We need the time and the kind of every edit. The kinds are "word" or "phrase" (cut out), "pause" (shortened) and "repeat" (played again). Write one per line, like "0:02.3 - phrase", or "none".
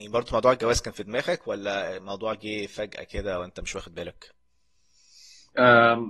none